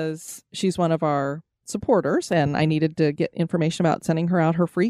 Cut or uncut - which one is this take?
uncut